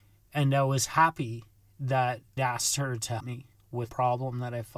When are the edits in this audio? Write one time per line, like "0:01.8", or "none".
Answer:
0:02.4
0:03.2
0:03.9